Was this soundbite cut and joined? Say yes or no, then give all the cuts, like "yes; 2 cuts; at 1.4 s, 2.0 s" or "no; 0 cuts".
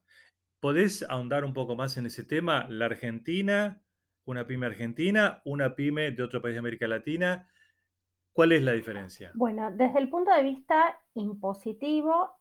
no; 0 cuts